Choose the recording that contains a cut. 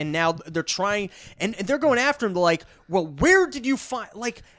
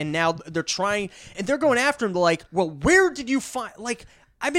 second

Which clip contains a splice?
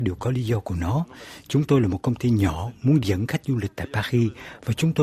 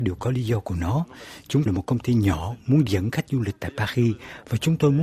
second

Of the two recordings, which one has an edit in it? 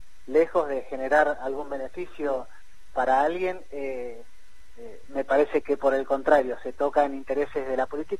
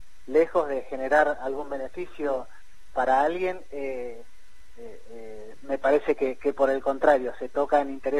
first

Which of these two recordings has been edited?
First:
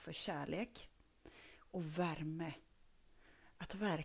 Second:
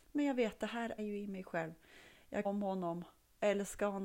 second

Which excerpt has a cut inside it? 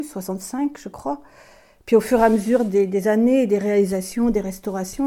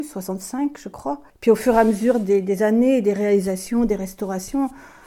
second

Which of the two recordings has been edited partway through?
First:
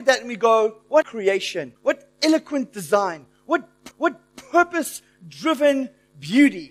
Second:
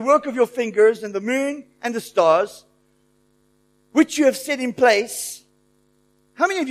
first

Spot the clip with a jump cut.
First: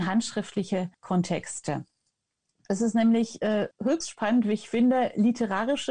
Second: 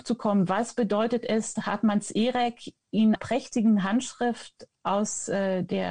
second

